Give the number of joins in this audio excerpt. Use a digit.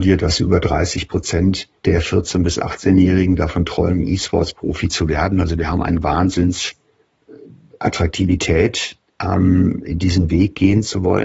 1